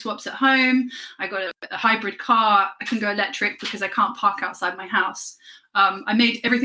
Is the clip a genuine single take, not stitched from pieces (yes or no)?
yes